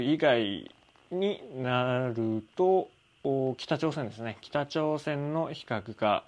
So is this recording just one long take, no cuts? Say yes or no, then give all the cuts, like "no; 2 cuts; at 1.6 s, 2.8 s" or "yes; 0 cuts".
yes; 0 cuts